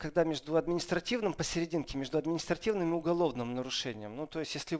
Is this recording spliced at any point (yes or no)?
no